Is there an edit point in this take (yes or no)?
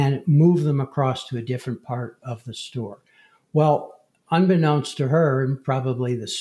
no